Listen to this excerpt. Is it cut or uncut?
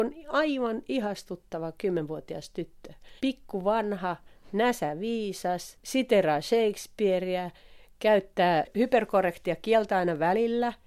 cut